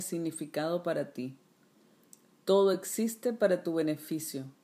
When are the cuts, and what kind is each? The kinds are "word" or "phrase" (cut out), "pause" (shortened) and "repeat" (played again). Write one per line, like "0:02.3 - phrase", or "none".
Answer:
none